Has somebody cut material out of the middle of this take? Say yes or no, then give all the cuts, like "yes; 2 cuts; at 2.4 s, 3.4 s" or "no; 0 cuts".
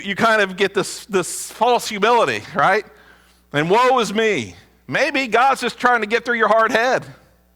no; 0 cuts